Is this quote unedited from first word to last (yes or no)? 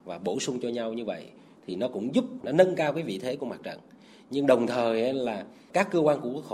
yes